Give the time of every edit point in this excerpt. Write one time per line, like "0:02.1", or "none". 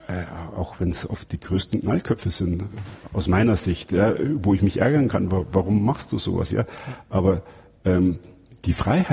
none